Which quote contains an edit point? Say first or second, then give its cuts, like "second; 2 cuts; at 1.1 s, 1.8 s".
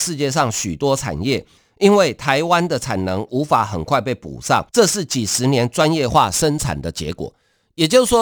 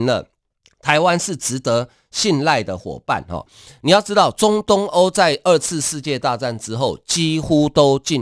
first; 1 cut; at 4.7 s